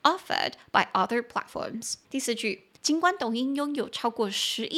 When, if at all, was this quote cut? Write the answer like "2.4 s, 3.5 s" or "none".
2.0 s, 2.8 s